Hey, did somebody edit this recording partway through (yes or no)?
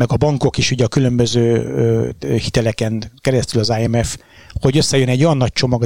no